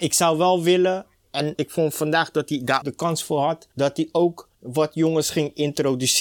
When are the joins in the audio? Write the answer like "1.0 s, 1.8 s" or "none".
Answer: 1.5 s, 2.8 s, 3.7 s, 4.5 s